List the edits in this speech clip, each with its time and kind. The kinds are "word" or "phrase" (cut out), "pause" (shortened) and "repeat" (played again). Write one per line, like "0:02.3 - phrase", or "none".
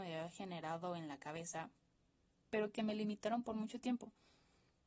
none

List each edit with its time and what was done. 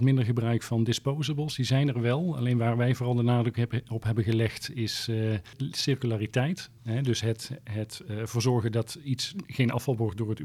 none

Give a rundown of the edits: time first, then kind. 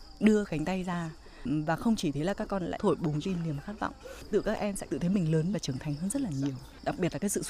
0:03.2 - word
0:04.9 - word
0:05.5 - word

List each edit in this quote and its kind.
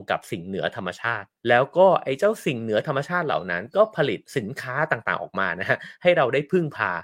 0:01.4 - pause
0:04.3 - pause

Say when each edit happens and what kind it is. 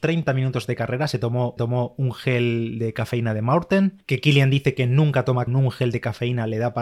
0:01.6 - repeat
0:05.5 - phrase

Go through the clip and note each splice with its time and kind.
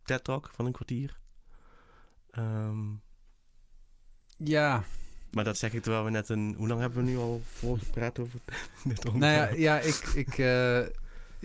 none

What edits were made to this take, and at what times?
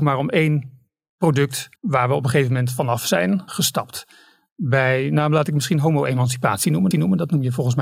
0:01.8 - pause
0:03.5 - word
0:06.9 - repeat

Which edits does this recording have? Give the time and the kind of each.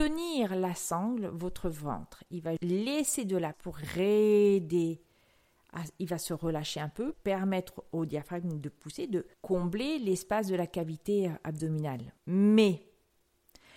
0:02.6 - word
0:03.5 - word
0:07.1 - word
0:09.3 - pause
0:12.2 - pause

